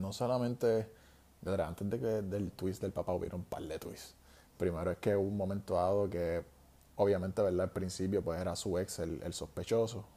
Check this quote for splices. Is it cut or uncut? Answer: uncut